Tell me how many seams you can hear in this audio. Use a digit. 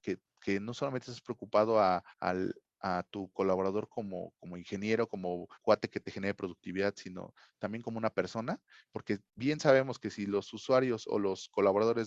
3